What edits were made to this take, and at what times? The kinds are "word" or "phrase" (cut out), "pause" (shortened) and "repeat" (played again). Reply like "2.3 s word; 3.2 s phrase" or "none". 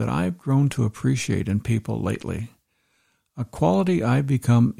none